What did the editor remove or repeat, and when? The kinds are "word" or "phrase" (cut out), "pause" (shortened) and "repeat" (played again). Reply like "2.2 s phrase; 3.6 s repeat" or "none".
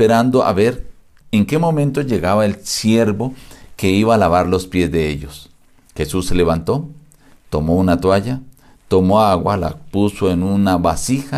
none